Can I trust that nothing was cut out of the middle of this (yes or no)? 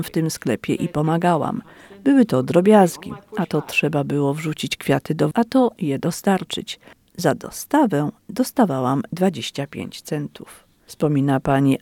no